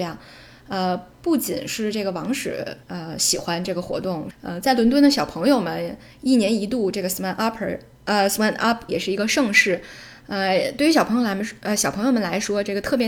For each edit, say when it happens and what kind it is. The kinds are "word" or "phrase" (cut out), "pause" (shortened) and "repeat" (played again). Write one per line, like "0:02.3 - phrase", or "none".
0:02.8 - pause
0:04.3 - phrase
0:08.9 - word